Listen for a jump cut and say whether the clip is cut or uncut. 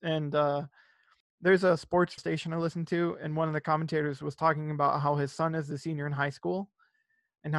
cut